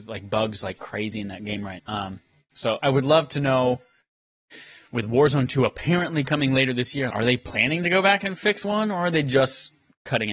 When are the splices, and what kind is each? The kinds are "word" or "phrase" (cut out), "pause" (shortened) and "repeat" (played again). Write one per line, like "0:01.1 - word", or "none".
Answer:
0:01.8 - word
0:02.8 - word
0:07.1 - word
0:08.6 - word